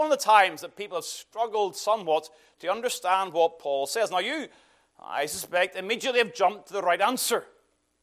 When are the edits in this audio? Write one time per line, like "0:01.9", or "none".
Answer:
none